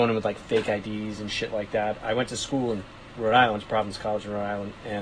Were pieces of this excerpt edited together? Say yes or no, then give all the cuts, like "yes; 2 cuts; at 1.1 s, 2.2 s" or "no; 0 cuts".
no; 0 cuts